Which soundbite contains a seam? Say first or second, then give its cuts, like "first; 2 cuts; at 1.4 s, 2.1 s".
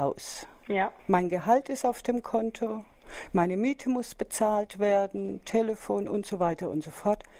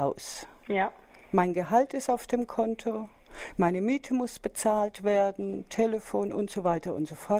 first; 1 cut; at 1.0 s